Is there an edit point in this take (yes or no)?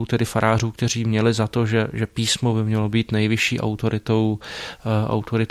no